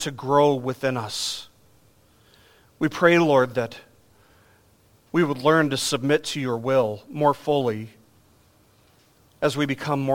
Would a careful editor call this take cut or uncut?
uncut